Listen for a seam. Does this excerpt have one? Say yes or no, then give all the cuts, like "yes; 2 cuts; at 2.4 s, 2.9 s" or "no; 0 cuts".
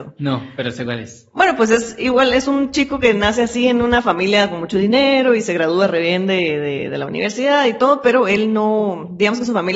no; 0 cuts